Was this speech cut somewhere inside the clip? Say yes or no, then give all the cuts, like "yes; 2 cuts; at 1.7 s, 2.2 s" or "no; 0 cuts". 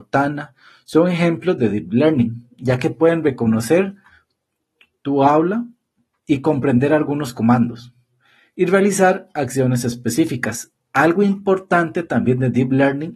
no; 0 cuts